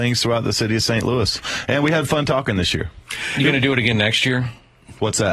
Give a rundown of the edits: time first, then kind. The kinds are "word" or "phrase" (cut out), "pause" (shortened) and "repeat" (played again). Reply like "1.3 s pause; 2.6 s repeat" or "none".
none